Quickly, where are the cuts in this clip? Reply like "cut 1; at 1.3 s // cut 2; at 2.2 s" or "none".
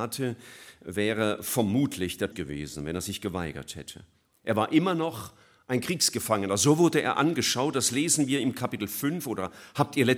cut 1; at 2.3 s